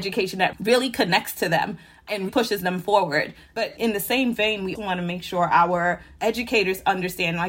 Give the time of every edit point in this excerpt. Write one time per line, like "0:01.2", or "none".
0:02.3
0:04.7